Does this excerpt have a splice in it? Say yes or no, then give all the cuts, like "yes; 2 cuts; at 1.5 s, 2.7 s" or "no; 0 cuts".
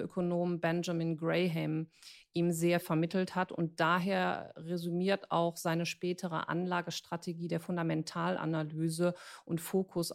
yes; 1 cut; at 2.8 s